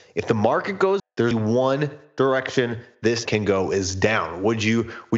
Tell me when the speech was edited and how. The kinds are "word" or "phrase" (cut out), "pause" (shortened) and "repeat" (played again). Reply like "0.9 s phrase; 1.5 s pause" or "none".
1.0 s word; 1.3 s word; 3.2 s word